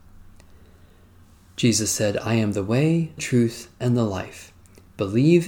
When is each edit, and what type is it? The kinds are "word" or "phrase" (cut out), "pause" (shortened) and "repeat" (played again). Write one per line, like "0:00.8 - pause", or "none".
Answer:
0:03.2 - word